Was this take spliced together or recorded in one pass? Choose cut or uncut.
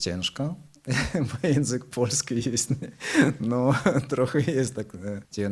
uncut